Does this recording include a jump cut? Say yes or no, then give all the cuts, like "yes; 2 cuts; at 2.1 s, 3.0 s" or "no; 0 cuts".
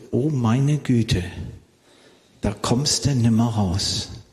no; 0 cuts